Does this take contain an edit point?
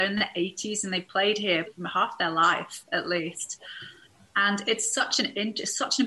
yes; 1 cut; at 1.7 s

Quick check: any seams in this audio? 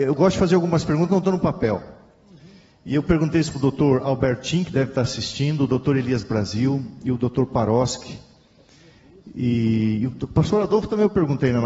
no; 0 cuts

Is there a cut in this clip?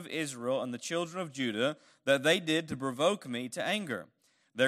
no; 0 cuts

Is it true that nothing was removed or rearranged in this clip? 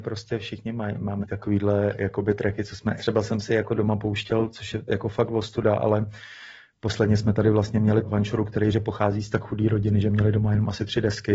no; 4 cuts; at 1.2 s, 3.0 s, 8.0 s, 8.7 s

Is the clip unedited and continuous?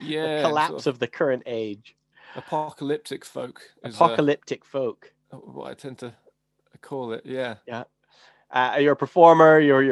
yes; 0 cuts

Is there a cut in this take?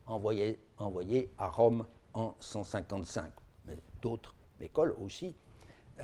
no; 0 cuts

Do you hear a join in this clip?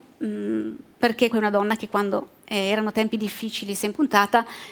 yes; 1 cut; at 1.3 s

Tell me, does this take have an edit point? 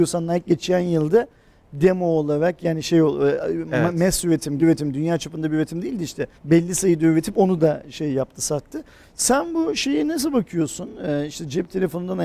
yes; 2 cuts; at 4.6 s, 6.4 s

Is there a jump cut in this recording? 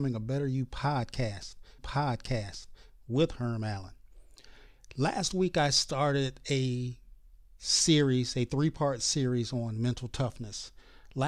yes; 1 cut; at 1.8 s

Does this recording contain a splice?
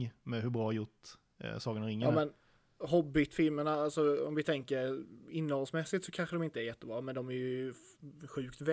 no; 0 cuts

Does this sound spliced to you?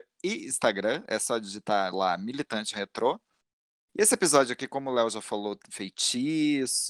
no; 0 cuts

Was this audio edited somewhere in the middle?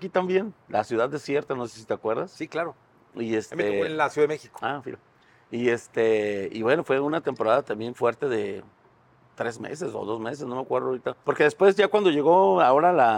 yes; 1 cut; at 11.2 s

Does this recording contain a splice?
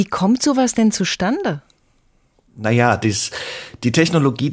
no; 0 cuts

